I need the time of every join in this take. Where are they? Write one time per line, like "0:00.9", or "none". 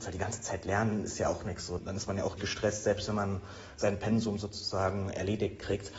0:01.8
0:02.4